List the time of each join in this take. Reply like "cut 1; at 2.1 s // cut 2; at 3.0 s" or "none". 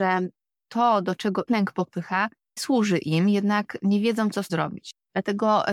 cut 1; at 1.5 s // cut 2; at 2.6 s // cut 3; at 4.5 s